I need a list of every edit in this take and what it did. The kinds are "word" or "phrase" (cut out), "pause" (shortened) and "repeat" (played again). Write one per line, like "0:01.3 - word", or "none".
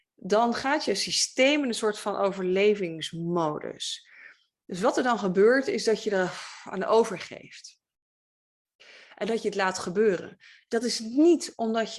none